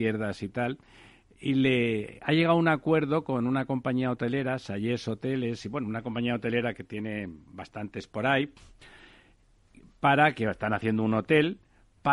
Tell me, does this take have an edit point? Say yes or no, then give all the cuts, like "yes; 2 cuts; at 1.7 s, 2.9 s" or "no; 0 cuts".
no; 0 cuts